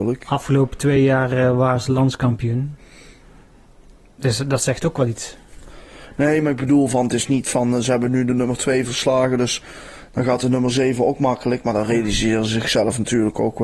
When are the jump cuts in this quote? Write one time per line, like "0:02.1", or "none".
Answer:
none

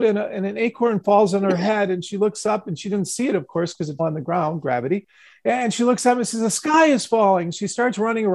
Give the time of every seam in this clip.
0:04.0

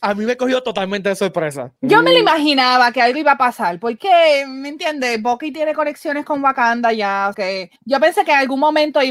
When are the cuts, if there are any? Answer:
0:01.8
0:04.0
0:07.3
0:07.8

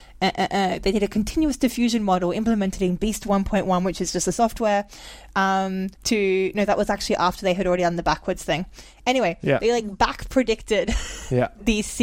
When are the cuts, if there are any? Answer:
0:05.9

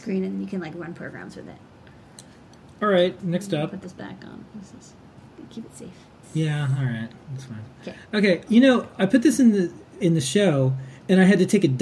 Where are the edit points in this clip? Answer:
0:03.2
0:06.2
0:08.5
0:10.0

